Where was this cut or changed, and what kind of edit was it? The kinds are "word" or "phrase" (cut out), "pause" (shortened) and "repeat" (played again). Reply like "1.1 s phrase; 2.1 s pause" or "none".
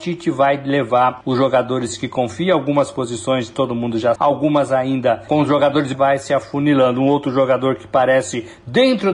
4.2 s word; 5.9 s phrase